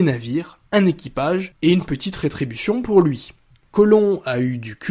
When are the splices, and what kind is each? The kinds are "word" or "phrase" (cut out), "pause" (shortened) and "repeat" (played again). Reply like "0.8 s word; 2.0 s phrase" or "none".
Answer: none